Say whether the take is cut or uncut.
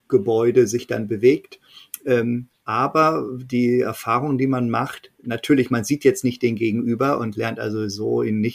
uncut